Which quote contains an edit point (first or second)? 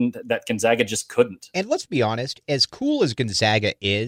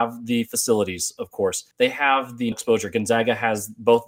second